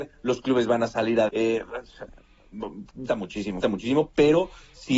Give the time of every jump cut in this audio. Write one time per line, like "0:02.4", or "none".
0:01.3
0:03.1
0:03.6